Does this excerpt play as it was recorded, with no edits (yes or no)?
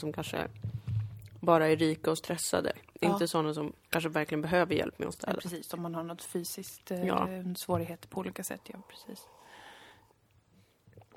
no